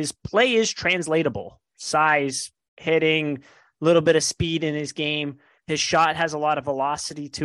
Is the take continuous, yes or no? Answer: yes